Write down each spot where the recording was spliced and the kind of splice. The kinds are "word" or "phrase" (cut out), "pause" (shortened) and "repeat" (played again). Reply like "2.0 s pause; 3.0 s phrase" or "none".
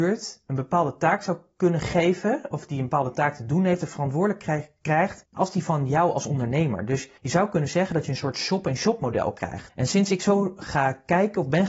7.2 s pause